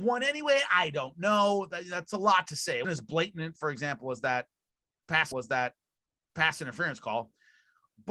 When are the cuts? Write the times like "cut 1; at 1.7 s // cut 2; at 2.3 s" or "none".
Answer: cut 1; at 2.1 s // cut 2; at 2.8 s // cut 3; at 5.3 s

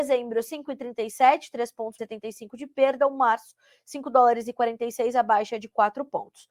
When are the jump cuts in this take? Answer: cut 1; at 2.0 s

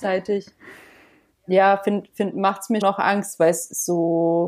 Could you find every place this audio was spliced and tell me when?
cut 1; at 2.8 s

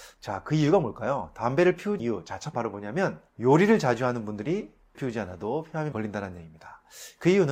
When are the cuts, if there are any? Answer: cut 1; at 2.0 s // cut 2; at 2.5 s // cut 3; at 3.3 s // cut 4; at 4.9 s // cut 5; at 5.9 s

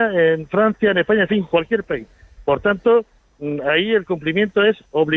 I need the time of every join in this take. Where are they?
none

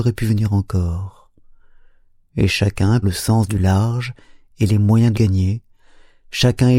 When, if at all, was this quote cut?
cut 1; at 3.0 s // cut 2; at 5.1 s

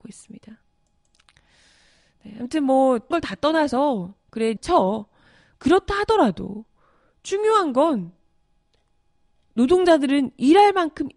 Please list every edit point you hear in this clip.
cut 1; at 3.1 s // cut 2; at 4.6 s

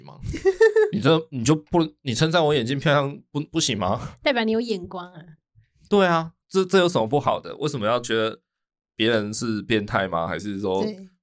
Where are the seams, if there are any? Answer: cut 1; at 6.4 s

